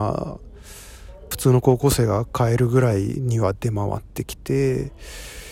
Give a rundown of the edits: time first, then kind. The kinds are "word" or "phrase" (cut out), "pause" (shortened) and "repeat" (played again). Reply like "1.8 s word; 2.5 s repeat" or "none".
1.3 s phrase